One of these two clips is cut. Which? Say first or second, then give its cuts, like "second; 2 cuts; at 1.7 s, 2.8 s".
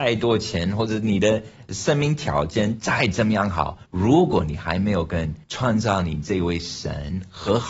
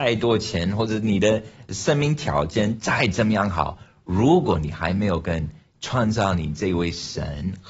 first; 2 cuts; at 3.9 s, 5.4 s